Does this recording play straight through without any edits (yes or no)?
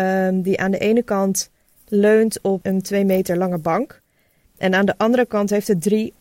yes